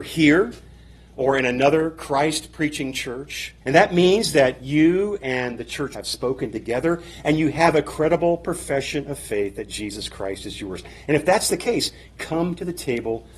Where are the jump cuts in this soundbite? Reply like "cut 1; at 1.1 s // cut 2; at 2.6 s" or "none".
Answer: cut 1; at 3.6 s // cut 2; at 5.9 s